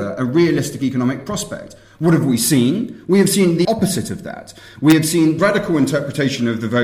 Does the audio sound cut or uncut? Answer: cut